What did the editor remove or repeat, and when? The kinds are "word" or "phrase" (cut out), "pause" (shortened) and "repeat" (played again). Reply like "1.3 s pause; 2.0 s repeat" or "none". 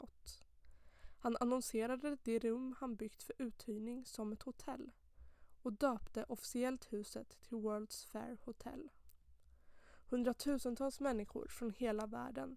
none